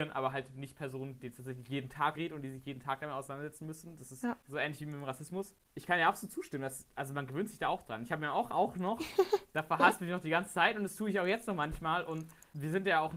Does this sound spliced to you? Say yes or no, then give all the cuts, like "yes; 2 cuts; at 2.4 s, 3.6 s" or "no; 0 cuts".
yes; 3 cuts; at 1.2 s, 2.1 s, 8.5 s